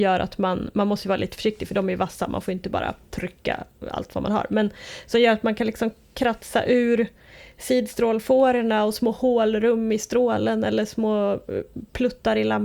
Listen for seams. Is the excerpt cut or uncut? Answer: uncut